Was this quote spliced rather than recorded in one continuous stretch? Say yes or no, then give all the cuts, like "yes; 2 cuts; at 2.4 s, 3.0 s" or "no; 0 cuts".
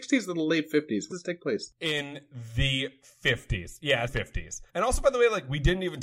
yes; 3 cuts; at 1.1 s, 4.1 s, 4.7 s